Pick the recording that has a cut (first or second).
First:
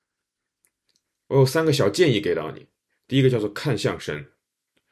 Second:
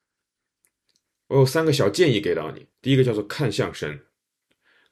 second